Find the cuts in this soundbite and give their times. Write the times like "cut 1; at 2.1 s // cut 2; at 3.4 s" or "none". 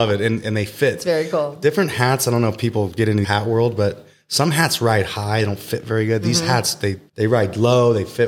cut 1; at 3.2 s // cut 2; at 7.1 s